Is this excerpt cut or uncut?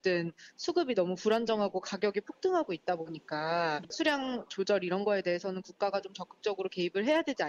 uncut